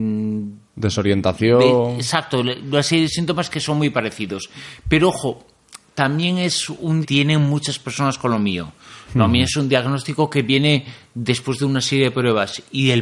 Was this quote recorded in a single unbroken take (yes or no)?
no